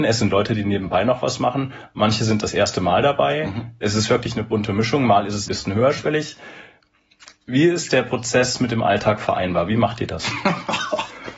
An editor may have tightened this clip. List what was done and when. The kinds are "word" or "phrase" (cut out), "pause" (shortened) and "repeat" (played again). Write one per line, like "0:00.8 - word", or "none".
0:05.5 - phrase